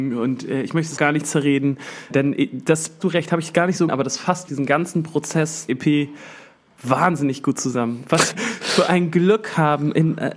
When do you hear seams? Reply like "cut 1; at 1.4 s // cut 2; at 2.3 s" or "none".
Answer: cut 1; at 1.0 s // cut 2; at 2.1 s // cut 3; at 3.0 s // cut 4; at 3.9 s // cut 5; at 4.5 s // cut 6; at 5.7 s // cut 7; at 8.3 s